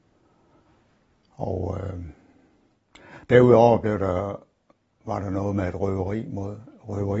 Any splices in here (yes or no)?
no